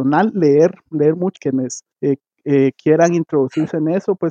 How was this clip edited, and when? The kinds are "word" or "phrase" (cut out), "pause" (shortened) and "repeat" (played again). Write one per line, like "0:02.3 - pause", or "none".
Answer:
0:01.3 - phrase
0:01.9 - pause

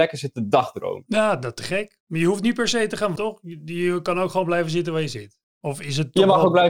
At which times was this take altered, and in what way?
0:03.2 - word

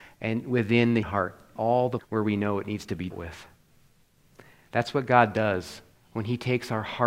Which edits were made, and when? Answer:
0:01.0 - word
0:01.6 - word
0:02.0 - word
0:03.1 - word

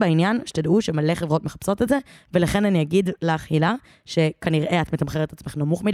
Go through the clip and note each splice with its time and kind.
none

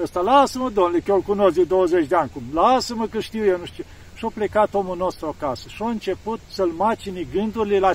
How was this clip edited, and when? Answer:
0:06.4 - pause

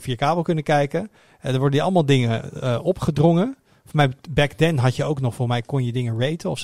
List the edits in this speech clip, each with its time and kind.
none

